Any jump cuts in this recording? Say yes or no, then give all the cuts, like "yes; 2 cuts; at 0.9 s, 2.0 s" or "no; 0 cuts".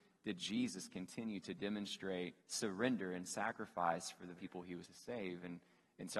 yes; 3 cuts; at 2.4 s, 4.4 s, 4.8 s